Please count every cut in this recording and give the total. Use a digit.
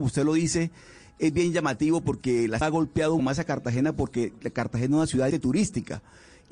3